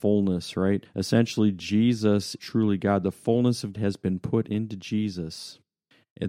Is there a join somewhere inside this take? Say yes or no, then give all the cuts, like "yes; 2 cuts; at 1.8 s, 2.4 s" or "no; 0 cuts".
yes; 2 cuts; at 2.4 s, 3.7 s